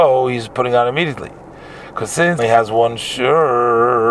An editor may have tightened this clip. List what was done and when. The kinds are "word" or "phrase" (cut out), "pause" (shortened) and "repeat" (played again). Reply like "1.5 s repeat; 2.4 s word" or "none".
2.4 s phrase